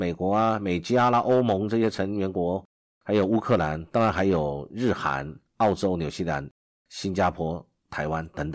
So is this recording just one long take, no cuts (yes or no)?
yes